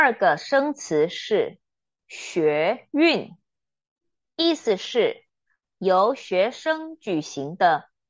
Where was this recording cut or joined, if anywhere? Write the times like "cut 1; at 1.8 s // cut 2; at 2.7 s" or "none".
none